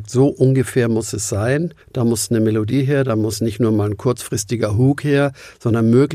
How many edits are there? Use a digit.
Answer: 1